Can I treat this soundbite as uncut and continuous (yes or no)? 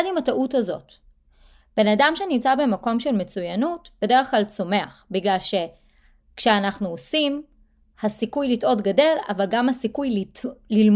yes